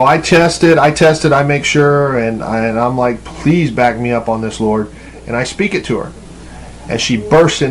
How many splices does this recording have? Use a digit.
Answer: 0